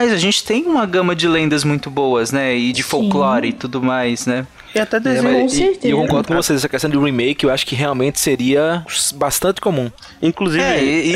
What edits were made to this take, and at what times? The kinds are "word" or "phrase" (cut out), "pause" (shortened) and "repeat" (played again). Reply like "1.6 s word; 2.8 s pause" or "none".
2.7 s word